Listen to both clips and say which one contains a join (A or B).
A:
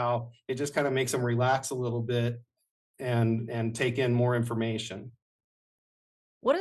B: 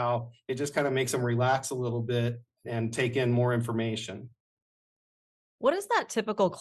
B